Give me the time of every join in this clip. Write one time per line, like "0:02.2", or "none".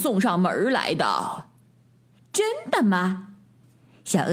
none